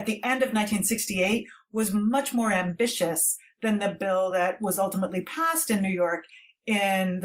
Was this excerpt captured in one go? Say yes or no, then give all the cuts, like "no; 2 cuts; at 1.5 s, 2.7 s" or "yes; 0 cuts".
yes; 0 cuts